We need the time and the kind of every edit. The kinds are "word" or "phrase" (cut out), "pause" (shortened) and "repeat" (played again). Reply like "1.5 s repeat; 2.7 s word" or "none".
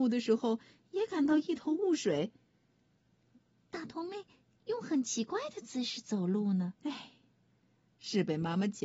6.8 s pause